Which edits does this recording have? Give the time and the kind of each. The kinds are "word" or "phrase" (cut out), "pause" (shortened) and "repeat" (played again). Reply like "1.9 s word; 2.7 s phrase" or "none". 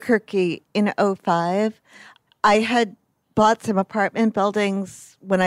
none

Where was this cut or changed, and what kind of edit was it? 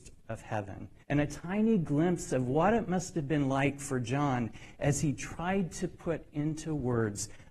1.0 s pause

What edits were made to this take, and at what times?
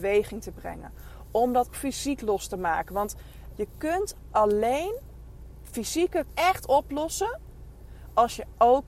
1.7 s word; 3.5 s phrase; 6.3 s word

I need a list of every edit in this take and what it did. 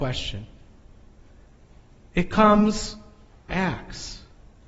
3.5 s word

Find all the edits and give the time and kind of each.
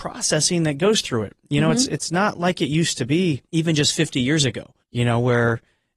3.5 s pause; 4.8 s pause

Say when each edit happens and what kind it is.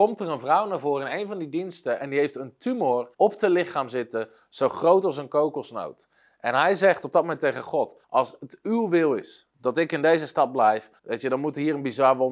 3.1 s pause; 8.0 s pause; 11.0 s pause

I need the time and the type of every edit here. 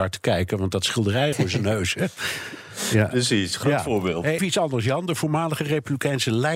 1.3 s phrase; 4.4 s word

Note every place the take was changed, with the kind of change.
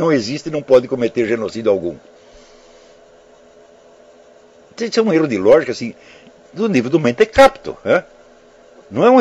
none

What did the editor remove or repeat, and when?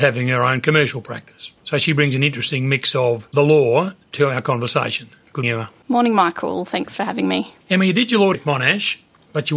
1.6 s pause; 5.4 s word; 7.6 s pause; 8.3 s word

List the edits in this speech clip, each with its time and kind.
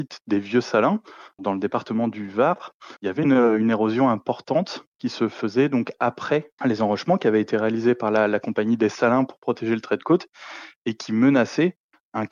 3.0 s pause

